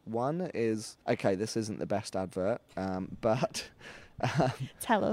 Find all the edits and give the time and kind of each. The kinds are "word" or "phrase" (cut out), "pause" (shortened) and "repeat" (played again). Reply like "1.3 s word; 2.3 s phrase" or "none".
1.0 s pause

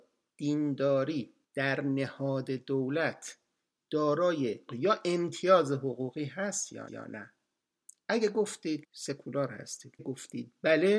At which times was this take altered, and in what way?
1.4 s pause; 4.7 s word; 6.9 s repeat; 8.8 s word; 10.0 s word

